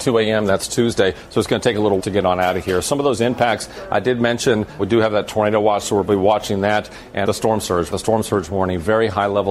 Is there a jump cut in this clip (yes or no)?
yes